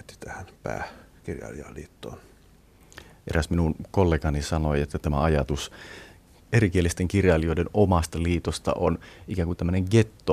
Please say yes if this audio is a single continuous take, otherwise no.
yes